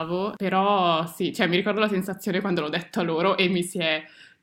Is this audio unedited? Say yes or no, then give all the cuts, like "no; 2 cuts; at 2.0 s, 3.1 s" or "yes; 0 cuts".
yes; 0 cuts